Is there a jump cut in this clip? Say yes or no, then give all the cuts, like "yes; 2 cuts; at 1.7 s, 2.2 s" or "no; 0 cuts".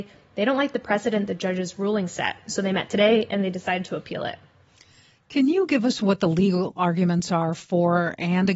no; 0 cuts